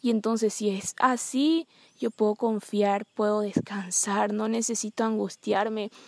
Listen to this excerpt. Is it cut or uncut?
uncut